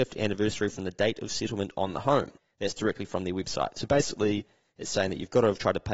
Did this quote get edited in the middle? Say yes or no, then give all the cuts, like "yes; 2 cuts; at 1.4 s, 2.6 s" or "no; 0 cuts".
yes; 1 cut; at 2.4 s